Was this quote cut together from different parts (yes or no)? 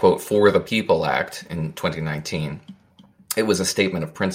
no